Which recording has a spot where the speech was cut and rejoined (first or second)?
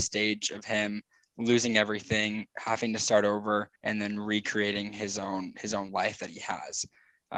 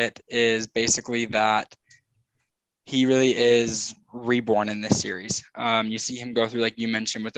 first